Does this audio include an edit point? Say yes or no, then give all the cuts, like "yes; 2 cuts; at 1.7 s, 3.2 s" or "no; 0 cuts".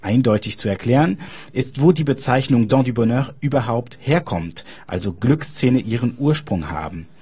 no; 0 cuts